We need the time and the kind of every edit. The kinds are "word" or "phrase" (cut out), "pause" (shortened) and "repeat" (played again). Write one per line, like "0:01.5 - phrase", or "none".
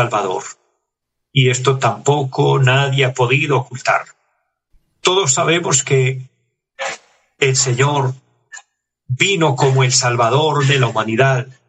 none